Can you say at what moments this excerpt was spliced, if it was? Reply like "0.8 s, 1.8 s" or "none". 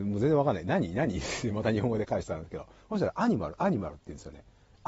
none